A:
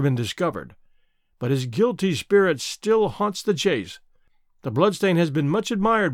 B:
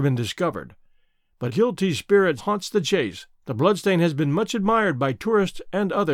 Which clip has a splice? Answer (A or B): B